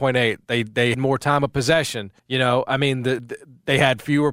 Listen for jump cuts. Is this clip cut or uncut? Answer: cut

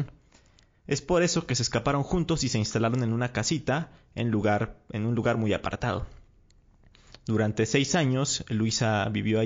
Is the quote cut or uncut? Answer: uncut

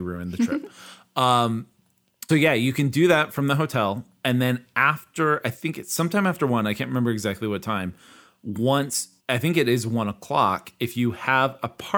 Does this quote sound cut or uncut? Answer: cut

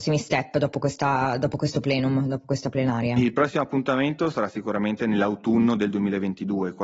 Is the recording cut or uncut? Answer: uncut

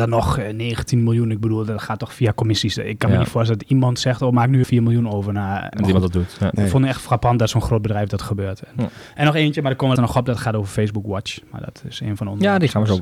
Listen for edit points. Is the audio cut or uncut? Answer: cut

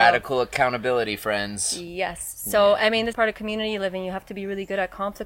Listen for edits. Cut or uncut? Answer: cut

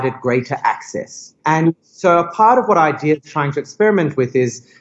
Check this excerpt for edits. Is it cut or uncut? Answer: cut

